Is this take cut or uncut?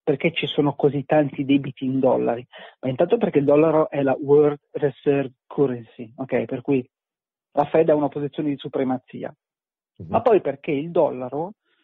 uncut